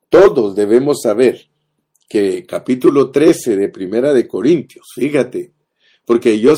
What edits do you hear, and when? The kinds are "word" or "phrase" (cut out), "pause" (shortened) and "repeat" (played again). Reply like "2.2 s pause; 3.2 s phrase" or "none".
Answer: none